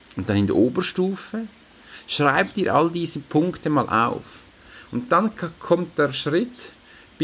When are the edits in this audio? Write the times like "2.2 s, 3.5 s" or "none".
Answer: none